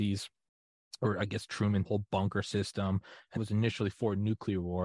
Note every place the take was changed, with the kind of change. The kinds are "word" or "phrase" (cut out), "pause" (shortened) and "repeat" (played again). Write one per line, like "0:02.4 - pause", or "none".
0:01.8 - phrase
0:03.4 - word